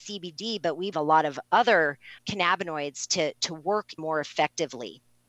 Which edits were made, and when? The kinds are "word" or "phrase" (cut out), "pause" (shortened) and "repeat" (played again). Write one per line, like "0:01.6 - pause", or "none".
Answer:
0:00.9 - word
0:02.2 - word
0:04.0 - word